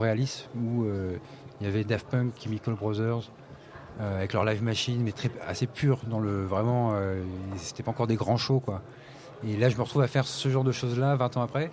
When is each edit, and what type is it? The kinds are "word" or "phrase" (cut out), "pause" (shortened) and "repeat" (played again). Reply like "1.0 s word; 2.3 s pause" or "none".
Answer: none